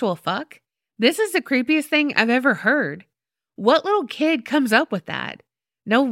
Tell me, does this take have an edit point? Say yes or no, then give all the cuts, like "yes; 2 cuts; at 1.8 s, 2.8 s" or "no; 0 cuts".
no; 0 cuts